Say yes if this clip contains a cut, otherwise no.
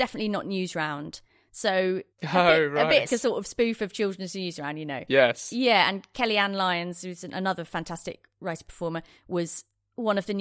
yes